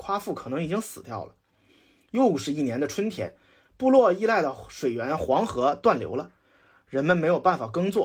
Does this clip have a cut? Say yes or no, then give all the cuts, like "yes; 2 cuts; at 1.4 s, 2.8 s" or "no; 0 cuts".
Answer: no; 0 cuts